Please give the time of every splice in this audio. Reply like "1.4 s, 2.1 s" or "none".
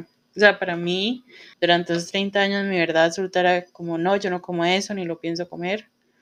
1.5 s